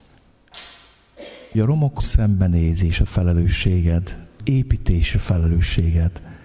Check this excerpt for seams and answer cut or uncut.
cut